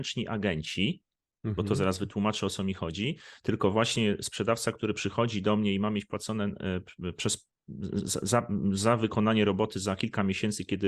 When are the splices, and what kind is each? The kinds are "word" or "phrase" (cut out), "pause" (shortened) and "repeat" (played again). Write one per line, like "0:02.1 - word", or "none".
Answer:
none